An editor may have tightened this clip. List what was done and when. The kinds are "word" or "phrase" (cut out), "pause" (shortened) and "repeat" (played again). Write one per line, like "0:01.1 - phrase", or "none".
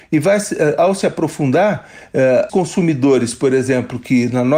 0:02.5 - word